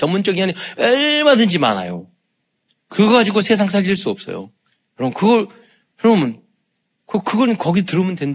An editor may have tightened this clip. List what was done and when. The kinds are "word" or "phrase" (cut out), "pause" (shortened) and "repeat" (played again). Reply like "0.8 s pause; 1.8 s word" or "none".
none